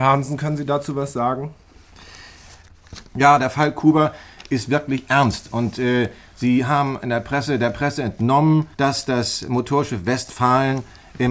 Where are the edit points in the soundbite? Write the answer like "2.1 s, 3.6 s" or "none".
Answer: 8.7 s